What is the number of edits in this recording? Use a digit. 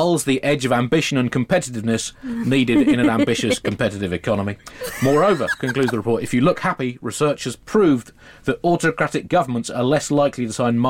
0